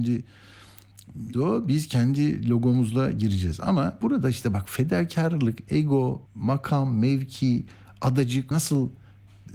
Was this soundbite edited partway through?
yes; 4 cuts; at 1.3 s, 4.0 s, 6.3 s, 8.5 s

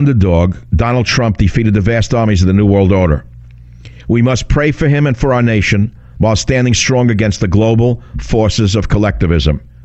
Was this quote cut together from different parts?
no; 0 cuts

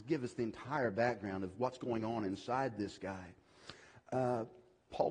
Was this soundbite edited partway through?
no; 0 cuts

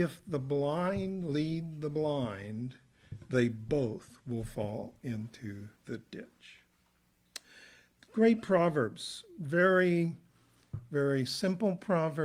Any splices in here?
yes; 1 cut; at 5.8 s

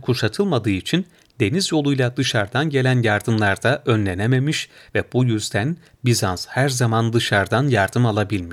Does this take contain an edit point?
no; 0 cuts

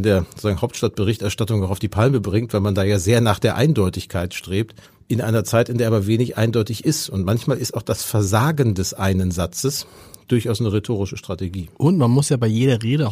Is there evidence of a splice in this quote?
yes; 1 cut; at 4.8 s

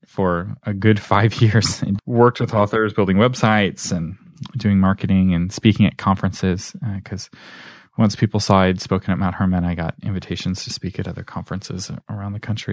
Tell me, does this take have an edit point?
yes; 1 cut; at 2.0 s

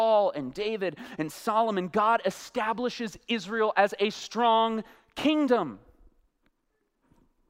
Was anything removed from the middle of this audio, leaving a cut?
no; 0 cuts

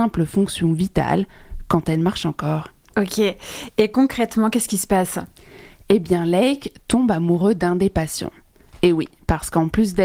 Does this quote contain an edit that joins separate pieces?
no; 0 cuts

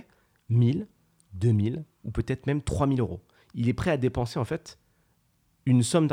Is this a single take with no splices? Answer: yes; 0 cuts

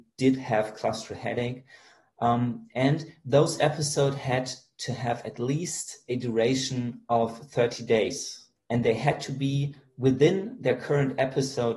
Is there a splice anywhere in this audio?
no; 0 cuts

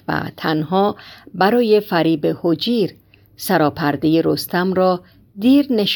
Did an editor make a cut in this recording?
no; 0 cuts

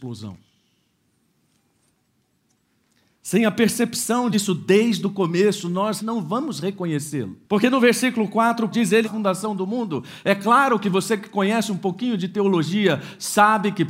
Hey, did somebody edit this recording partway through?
yes; 5 cuts; at 4.3 s, 6.0 s, 7.4 s, 8.7 s, 9.0 s

